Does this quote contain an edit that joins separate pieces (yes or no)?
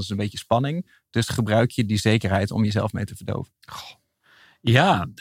no